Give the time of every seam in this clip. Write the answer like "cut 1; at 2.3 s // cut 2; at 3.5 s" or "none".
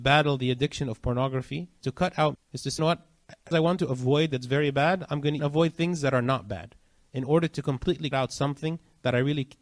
cut 1; at 1.8 s // cut 2; at 2.3 s // cut 3; at 2.8 s // cut 4; at 3.5 s // cut 5; at 4.3 s // cut 6; at 5.4 s // cut 7; at 8.1 s